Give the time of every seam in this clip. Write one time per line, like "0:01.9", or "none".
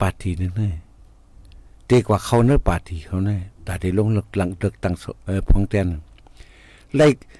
0:03.6